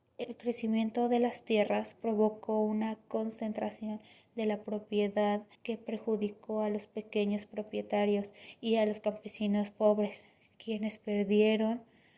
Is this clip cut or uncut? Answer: cut